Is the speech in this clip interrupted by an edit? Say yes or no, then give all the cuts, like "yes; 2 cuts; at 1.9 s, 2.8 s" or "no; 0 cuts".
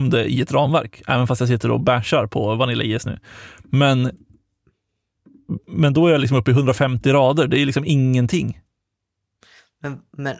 no; 0 cuts